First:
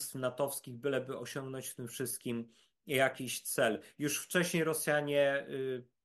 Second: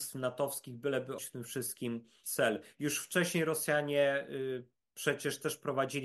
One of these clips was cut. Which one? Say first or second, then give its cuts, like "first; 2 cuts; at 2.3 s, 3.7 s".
second; 2 cuts; at 1.2 s, 2.2 s